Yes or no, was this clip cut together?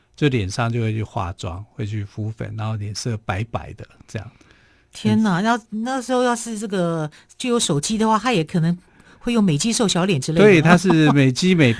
no